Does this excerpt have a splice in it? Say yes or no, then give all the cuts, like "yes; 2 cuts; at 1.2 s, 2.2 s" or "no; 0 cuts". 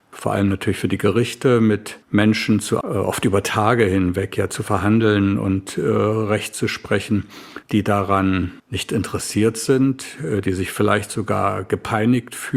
yes; 4 cuts; at 2.0 s, 2.8 s, 7.6 s, 8.6 s